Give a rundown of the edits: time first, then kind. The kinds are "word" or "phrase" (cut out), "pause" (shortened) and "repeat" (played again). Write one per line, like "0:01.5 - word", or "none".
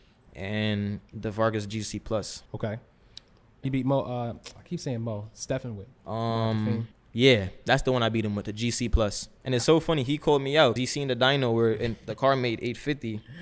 0:02.5 - pause
0:03.6 - phrase
0:06.0 - pause
0:06.9 - pause
0:09.4 - pause
0:10.8 - word

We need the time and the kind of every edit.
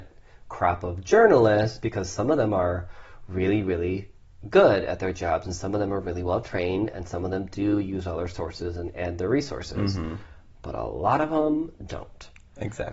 none

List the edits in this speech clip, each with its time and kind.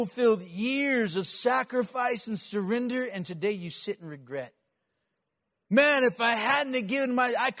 none

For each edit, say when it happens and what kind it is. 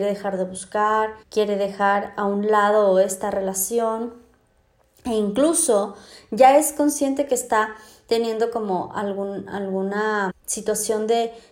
0:01.2 - pause
0:10.3 - word

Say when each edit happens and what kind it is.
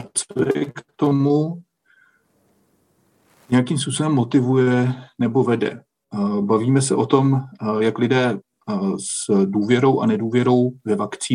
none

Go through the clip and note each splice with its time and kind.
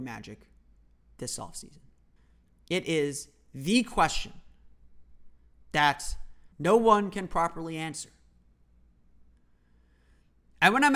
0:02.2 - pause
0:06.5 - pause

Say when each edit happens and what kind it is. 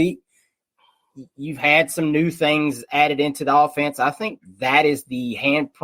none

